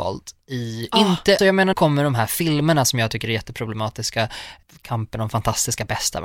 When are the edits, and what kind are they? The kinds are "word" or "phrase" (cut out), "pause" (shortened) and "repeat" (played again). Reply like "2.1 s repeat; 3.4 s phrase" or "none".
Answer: 1.4 s word; 1.7 s word